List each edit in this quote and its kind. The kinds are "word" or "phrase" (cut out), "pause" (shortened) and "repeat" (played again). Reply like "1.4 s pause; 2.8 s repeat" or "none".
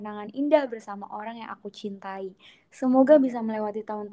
none